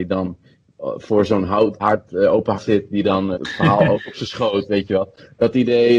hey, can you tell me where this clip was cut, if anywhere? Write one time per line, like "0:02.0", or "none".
0:01.8
0:02.5
0:03.3
0:03.9